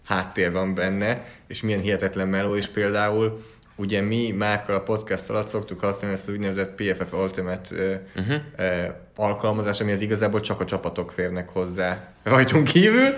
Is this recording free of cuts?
yes; 0 cuts

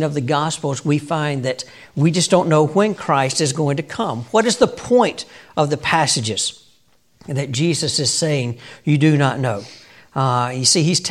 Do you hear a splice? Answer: no; 0 cuts

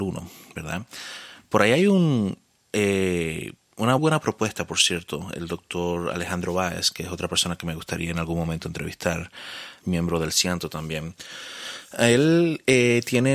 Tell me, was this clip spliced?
yes; 2 cuts; at 4.0 s, 9.8 s

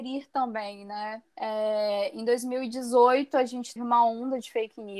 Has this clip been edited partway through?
yes; 2 cuts; at 1.3 s, 3.8 s

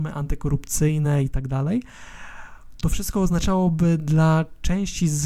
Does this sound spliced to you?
no; 0 cuts

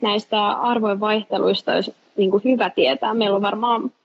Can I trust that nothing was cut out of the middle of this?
yes; 0 cuts

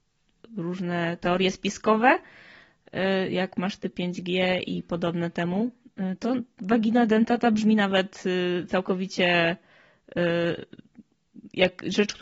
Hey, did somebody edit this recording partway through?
no; 0 cuts

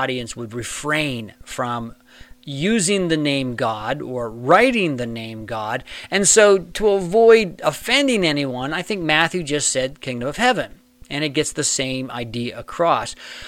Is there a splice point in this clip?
no; 0 cuts

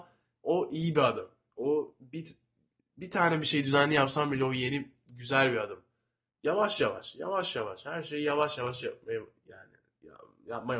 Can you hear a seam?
no; 0 cuts

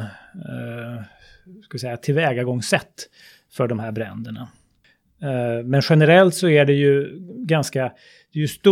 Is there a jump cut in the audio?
no; 0 cuts

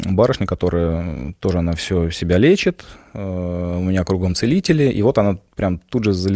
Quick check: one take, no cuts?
yes; 0 cuts

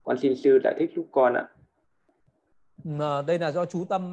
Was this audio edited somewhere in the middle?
no; 0 cuts

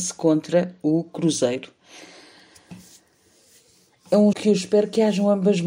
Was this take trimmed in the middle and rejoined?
yes; 1 cut; at 4.3 s

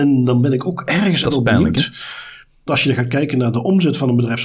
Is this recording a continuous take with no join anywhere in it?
no; 2 cuts; at 1.2 s, 2.7 s

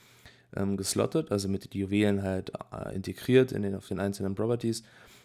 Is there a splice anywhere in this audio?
no; 0 cuts

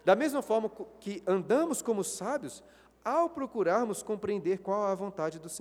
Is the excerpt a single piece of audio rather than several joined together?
yes; 0 cuts

